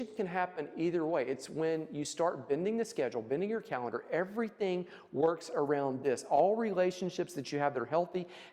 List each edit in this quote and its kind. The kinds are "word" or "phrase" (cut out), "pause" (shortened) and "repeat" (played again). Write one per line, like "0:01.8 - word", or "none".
none